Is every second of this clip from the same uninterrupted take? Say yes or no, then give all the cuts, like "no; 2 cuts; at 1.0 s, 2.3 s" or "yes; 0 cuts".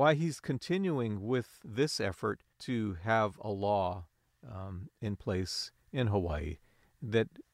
no; 1 cut; at 2.5 s